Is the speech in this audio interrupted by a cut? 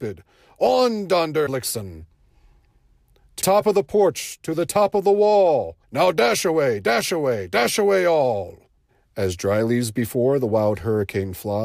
yes; 4 cuts; at 1.5 s, 3.4 s, 5.8 s, 8.9 s

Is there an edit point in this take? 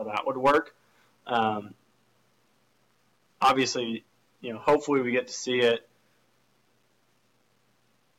no; 0 cuts

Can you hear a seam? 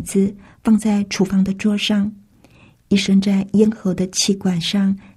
no; 0 cuts

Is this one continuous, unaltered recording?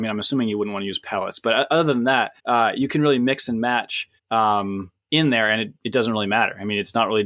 no; 2 cuts; at 2.4 s, 4.2 s

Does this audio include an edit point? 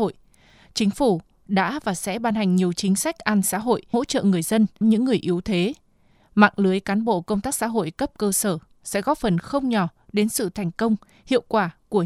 yes; 3 cuts; at 3.4 s, 3.9 s, 4.8 s

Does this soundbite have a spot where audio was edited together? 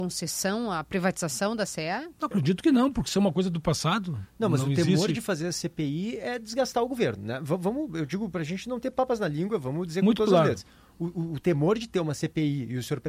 no; 0 cuts

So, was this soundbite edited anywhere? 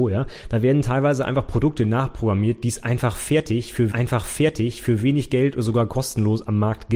yes; 1 cut; at 3.9 s

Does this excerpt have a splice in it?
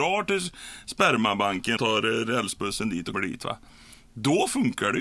yes; 2 cuts; at 1.8 s, 3.1 s

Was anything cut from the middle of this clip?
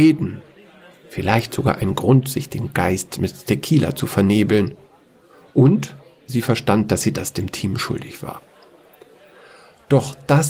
no; 0 cuts

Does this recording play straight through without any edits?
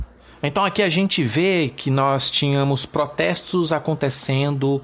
yes; 0 cuts

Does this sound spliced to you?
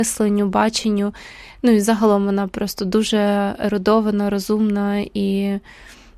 no; 0 cuts

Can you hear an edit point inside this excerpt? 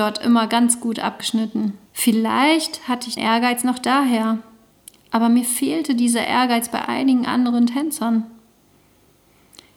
yes; 3 cuts; at 1.9 s, 3.2 s, 4.8 s

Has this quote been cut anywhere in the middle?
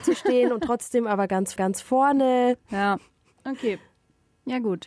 yes; 1 cut; at 1.6 s

